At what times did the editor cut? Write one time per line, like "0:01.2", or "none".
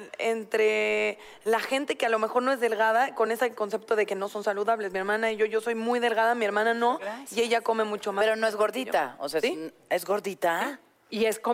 none